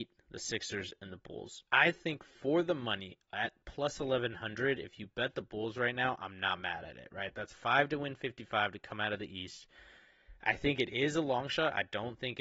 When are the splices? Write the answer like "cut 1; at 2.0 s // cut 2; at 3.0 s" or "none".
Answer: cut 1; at 1.7 s